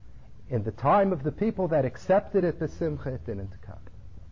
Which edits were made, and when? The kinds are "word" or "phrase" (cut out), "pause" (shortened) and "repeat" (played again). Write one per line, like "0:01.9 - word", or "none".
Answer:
none